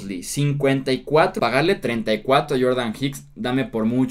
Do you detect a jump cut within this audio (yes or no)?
yes